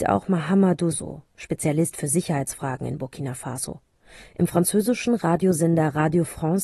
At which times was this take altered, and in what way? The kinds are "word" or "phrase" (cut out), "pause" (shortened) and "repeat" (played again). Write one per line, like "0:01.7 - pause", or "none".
0:00.9 - word